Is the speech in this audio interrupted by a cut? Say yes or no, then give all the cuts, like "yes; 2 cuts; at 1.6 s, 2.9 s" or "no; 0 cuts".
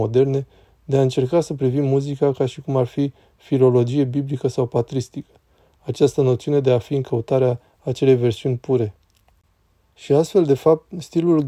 no; 0 cuts